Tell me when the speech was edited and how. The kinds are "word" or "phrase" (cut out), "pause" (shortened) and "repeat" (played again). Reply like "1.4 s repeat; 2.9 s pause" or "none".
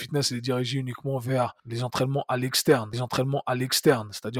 1.6 s pause; 2.9 s repeat